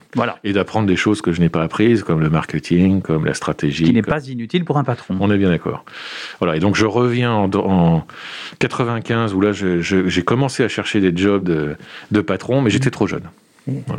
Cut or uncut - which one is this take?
uncut